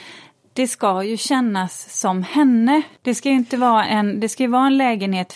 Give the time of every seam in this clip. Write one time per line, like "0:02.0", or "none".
0:03.0
0:03.8